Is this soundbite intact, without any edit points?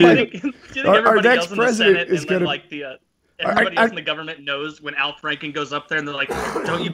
yes; 0 cuts

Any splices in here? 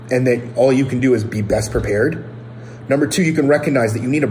no; 0 cuts

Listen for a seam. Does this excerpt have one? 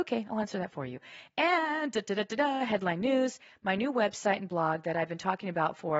no; 0 cuts

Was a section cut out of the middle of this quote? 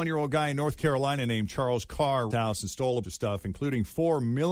yes; 2 cuts; at 2.3 s, 3.0 s

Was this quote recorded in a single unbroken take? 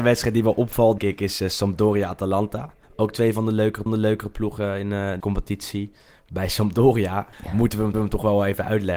no; 6 cuts; at 1.0 s, 2.8 s, 3.9 s, 5.2 s, 7.3 s, 7.9 s

